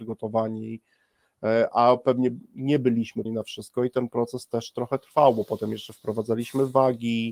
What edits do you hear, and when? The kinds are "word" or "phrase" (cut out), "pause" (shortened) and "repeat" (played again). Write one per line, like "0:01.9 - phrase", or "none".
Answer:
0:03.2 - word